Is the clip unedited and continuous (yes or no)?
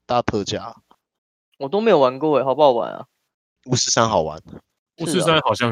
yes